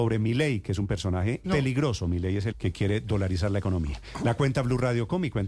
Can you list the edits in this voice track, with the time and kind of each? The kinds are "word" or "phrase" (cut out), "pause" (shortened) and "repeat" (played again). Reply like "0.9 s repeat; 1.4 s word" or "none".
1.4 s phrase; 2.5 s word